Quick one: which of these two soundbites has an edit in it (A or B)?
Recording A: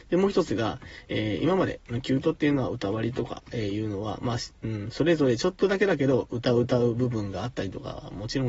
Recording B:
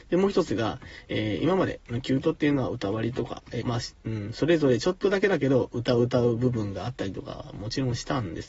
B